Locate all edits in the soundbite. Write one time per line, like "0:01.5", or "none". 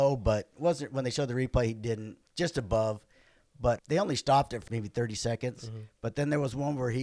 0:02.3
0:03.8
0:04.7